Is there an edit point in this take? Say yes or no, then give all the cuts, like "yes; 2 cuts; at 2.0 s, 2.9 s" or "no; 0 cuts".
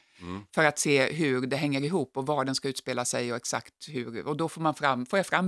no; 0 cuts